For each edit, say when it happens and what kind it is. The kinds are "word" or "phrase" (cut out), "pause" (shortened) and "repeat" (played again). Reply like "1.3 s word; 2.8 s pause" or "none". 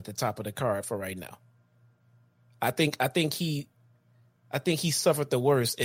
none